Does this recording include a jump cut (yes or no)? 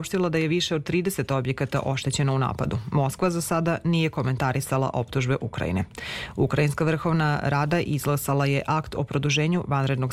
no